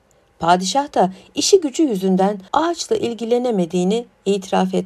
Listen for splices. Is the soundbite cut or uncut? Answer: cut